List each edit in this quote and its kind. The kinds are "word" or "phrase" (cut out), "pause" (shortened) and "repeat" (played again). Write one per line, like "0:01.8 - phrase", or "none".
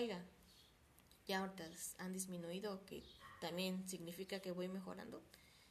0:01.2 - pause